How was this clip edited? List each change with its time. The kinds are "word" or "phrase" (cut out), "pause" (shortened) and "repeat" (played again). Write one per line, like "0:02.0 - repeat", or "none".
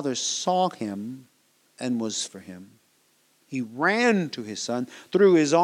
0:01.5 - pause
0:02.3 - phrase